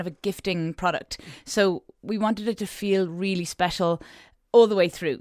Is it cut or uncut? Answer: uncut